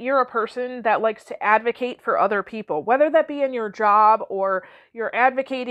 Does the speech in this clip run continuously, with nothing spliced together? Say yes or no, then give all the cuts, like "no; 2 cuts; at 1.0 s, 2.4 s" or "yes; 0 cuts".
yes; 0 cuts